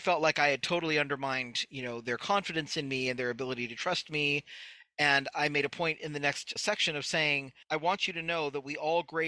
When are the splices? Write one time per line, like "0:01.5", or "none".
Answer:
0:06.6
0:07.6